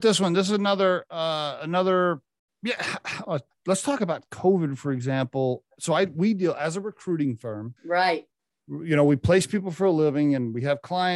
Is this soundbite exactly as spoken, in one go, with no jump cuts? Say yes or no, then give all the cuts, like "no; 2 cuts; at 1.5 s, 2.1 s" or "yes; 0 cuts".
no; 3 cuts; at 2.5 s, 5.7 s, 7.8 s